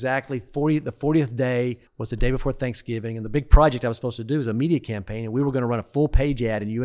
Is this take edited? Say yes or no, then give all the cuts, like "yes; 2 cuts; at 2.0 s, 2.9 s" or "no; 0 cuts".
yes; 1 cut; at 1.9 s